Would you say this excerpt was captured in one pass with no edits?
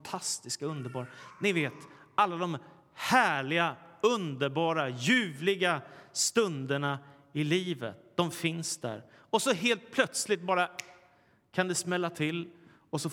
yes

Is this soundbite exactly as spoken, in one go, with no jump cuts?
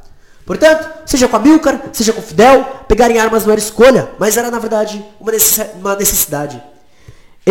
yes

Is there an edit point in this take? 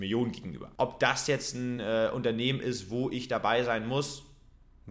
no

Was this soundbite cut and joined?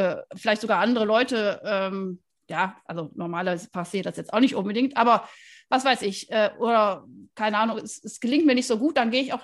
no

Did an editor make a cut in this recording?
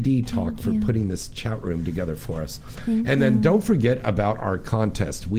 no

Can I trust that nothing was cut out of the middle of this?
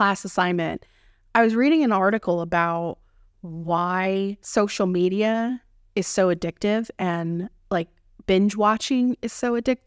yes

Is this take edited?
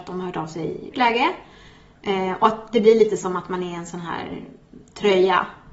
yes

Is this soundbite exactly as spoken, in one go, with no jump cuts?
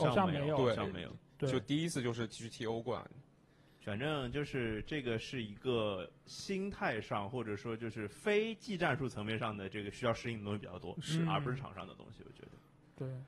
yes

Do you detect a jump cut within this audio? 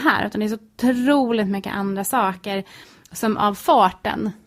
no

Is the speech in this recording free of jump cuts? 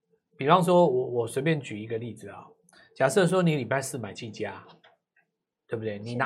yes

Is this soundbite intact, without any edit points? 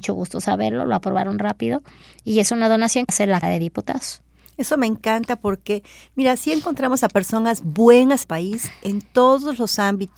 no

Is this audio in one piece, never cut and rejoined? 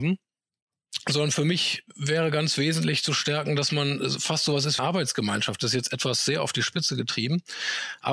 no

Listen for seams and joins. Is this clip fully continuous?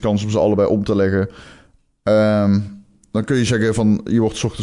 yes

